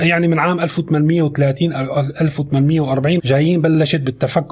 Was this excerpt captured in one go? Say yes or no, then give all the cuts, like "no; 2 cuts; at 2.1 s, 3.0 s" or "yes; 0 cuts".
no; 1 cut; at 3.2 s